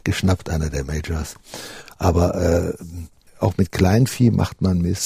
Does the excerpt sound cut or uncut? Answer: uncut